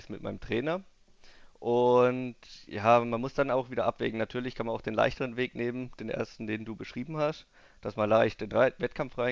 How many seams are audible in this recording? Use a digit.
0